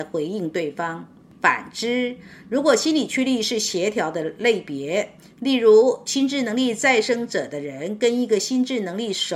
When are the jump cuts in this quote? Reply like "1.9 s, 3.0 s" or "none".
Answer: none